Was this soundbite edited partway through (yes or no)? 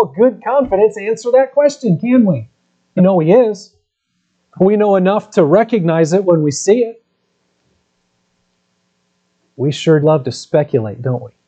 yes